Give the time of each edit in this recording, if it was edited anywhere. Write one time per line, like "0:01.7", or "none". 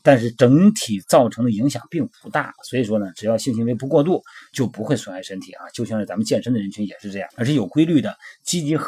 0:07.3